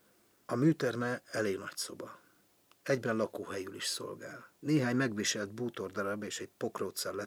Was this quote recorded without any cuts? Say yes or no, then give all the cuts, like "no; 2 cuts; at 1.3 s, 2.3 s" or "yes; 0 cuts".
no; 1 cut; at 4.6 s